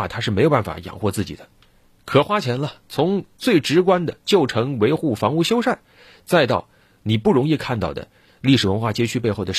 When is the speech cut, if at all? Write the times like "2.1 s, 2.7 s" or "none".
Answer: 4.2 s

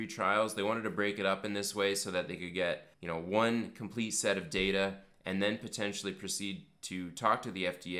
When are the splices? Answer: 2.9 s

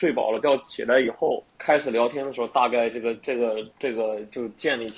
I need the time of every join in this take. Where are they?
1.5 s, 3.7 s

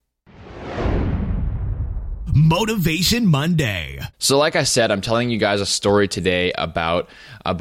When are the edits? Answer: 4.1 s

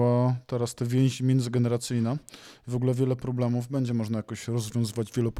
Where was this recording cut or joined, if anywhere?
none

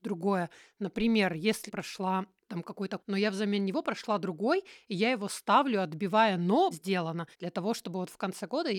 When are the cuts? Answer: 1.7 s, 3.0 s, 6.7 s, 7.3 s

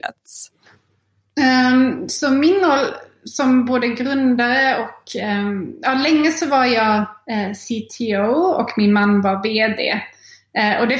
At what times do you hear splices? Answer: none

